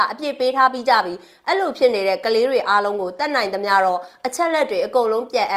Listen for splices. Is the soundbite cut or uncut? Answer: uncut